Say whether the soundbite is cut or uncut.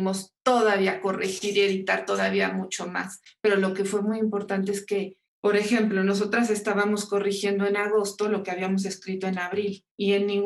uncut